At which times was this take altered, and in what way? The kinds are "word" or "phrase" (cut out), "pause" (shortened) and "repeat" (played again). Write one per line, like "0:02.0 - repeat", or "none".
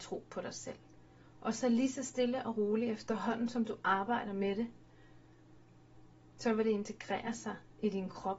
none